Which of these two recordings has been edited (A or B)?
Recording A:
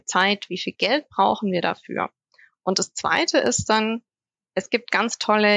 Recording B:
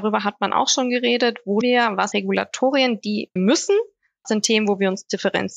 B